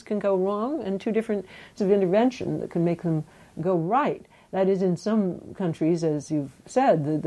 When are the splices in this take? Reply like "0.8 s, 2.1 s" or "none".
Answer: 1.8 s